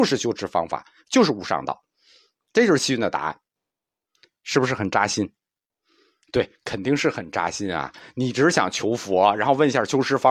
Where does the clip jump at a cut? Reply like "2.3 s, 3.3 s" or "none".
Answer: none